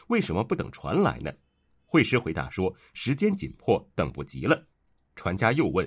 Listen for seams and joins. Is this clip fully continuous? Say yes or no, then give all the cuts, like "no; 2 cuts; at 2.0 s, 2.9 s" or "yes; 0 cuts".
no; 1 cut; at 4.7 s